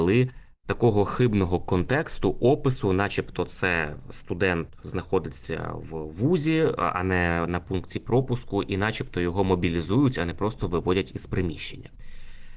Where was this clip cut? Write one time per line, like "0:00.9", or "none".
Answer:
none